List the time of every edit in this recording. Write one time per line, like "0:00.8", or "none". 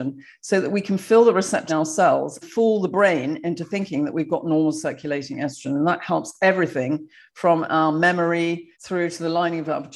0:01.7
0:02.4
0:08.7